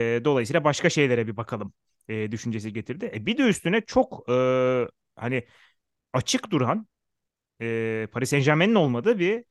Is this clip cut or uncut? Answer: uncut